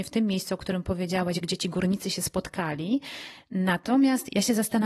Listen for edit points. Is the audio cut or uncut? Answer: uncut